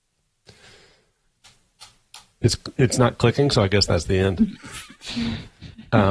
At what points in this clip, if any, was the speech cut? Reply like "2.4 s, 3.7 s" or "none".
none